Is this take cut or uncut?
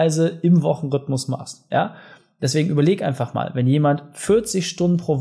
uncut